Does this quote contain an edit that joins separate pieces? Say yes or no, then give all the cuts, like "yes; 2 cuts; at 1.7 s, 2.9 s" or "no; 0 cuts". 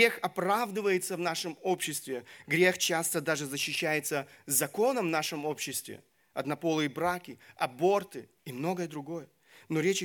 yes; 1 cut; at 8.4 s